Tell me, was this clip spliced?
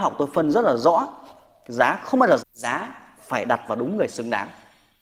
yes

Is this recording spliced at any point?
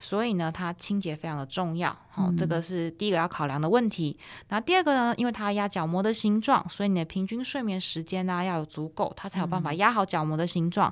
no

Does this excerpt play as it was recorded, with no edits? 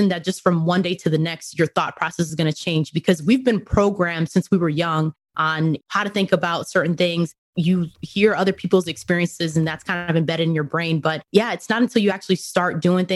yes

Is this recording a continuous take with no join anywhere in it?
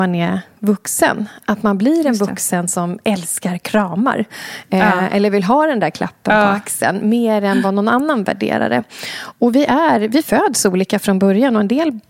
yes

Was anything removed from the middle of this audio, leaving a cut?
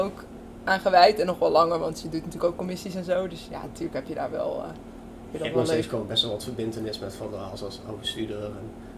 no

